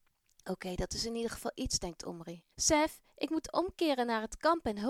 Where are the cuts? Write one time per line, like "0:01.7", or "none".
0:02.5